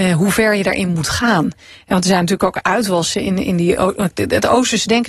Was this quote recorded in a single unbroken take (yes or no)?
yes